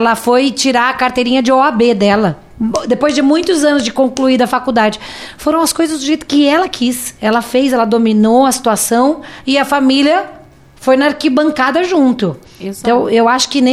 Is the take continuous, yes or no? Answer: yes